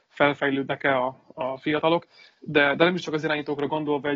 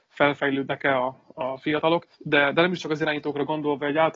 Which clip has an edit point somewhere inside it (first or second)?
second